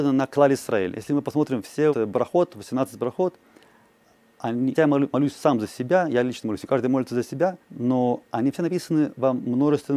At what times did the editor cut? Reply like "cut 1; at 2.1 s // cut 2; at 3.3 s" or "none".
cut 1; at 1.9 s // cut 2; at 4.7 s // cut 3; at 7.6 s